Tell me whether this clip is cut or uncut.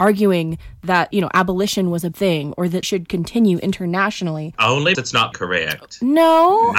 cut